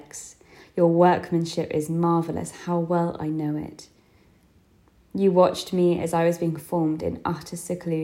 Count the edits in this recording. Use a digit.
0